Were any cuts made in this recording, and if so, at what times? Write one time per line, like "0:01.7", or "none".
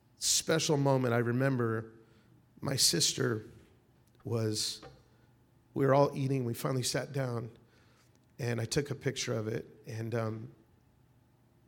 none